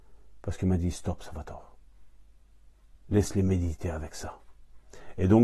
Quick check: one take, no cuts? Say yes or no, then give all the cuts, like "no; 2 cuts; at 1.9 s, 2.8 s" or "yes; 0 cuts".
yes; 0 cuts